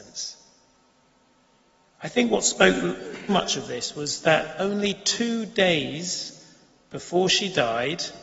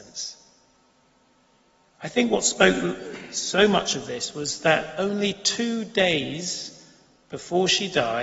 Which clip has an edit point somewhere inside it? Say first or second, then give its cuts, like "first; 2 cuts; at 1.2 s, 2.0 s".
first; 1 cut; at 3.3 s